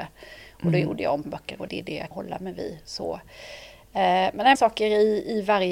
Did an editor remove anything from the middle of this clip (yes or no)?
yes